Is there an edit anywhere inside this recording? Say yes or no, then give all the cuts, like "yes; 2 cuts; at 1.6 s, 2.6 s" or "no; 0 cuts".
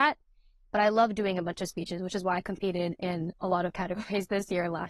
no; 0 cuts